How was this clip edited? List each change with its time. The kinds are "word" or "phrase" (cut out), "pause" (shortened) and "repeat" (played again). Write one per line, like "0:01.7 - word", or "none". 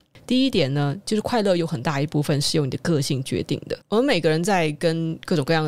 0:03.8 - pause